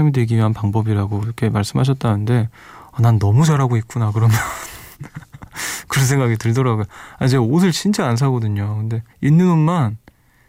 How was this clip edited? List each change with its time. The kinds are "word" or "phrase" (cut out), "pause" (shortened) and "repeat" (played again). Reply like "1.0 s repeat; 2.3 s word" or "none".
9.1 s pause